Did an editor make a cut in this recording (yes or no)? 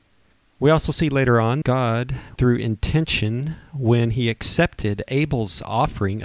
yes